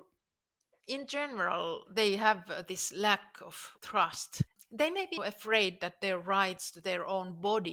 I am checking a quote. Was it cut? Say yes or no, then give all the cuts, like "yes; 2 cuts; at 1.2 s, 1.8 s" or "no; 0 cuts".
yes; 1 cut; at 5.2 s